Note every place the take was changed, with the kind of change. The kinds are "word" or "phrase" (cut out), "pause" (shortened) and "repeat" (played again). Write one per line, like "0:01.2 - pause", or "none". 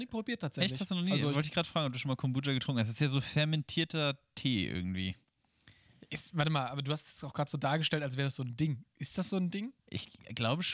0:09.8 - pause